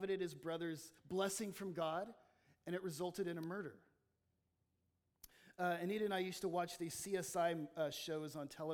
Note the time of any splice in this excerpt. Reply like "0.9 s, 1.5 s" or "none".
1.0 s